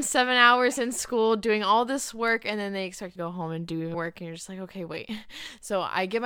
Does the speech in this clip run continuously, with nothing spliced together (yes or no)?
no